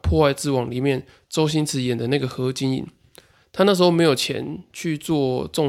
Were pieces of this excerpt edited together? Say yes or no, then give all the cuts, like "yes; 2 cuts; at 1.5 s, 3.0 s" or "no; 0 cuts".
no; 0 cuts